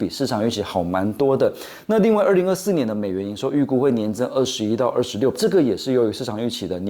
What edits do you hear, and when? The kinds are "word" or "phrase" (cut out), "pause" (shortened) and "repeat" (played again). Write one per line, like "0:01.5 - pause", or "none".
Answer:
0:05.3 - word